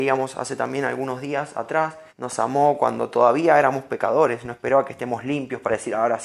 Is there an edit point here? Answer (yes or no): yes